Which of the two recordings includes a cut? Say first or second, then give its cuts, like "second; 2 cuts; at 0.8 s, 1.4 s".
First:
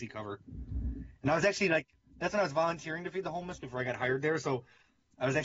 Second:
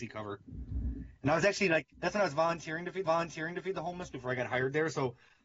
second; 2 cuts; at 1.9 s, 3.0 s